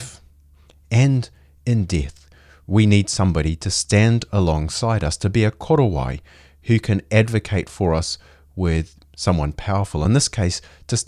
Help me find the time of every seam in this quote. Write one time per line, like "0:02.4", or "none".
none